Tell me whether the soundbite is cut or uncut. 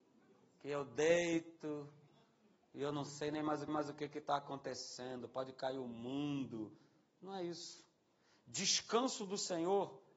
cut